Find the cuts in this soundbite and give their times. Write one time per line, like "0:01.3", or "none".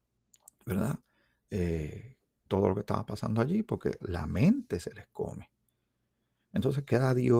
0:02.5
0:04.0

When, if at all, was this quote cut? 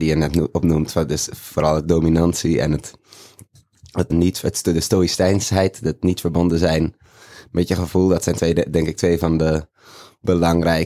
0:04.1

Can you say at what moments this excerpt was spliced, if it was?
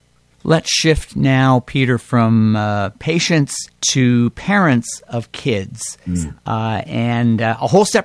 0:03.7

